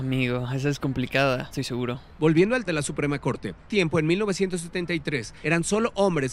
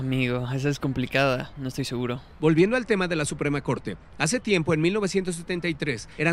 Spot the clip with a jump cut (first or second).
first